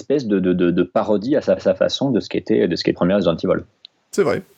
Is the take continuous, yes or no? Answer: no